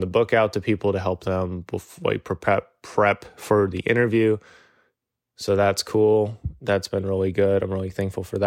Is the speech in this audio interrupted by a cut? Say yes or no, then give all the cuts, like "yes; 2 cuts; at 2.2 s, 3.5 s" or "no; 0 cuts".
no; 0 cuts